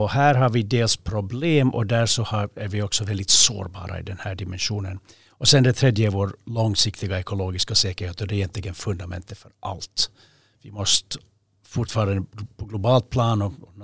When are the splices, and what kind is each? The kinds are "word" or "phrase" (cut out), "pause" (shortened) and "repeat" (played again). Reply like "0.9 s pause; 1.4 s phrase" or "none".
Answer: none